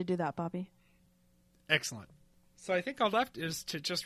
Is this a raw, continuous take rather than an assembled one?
no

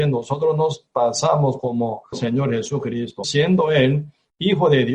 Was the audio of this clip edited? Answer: yes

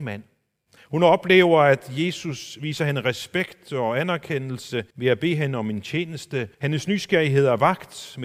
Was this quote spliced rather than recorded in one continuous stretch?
yes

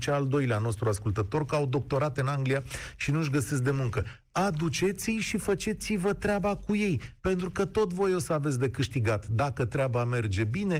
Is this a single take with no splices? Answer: yes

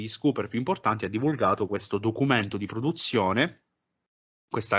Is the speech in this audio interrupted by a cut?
no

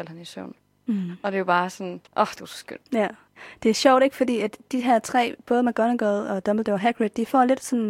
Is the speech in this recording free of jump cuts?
no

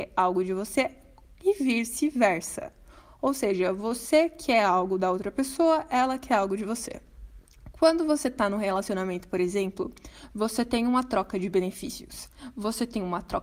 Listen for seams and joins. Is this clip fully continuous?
yes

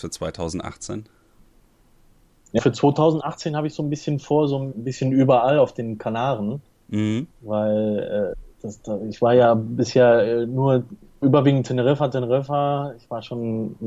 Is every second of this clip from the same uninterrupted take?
no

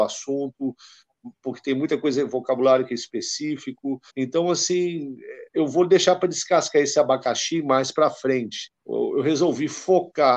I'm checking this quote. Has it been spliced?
yes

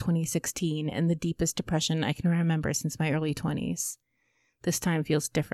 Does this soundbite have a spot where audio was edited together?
no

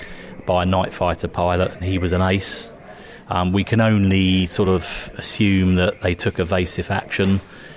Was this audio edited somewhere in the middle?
no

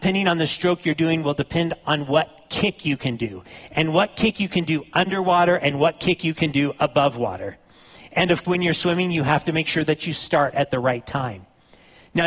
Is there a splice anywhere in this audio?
yes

